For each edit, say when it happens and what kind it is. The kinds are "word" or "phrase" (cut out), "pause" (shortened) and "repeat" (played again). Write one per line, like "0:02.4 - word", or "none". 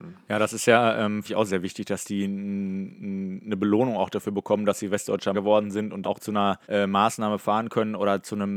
0:01.2 - phrase
0:05.3 - word
0:06.0 - word
0:06.6 - pause